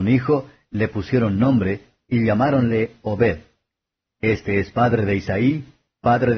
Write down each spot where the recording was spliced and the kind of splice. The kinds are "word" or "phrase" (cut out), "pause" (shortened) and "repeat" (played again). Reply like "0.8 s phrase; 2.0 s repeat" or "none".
none